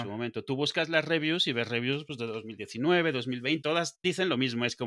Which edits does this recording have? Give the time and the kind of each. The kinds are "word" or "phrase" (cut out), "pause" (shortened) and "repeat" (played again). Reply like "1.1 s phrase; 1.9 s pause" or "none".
3.6 s word